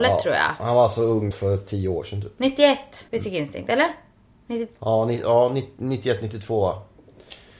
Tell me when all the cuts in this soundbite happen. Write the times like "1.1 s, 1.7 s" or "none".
1.3 s, 3.1 s